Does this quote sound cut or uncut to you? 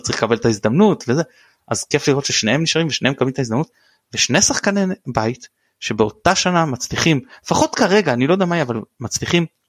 uncut